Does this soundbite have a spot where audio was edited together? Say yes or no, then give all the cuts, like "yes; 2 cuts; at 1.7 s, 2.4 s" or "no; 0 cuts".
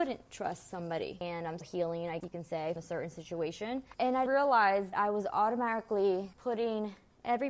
yes; 5 cuts; at 1.6 s, 2.2 s, 2.8 s, 4.3 s, 4.9 s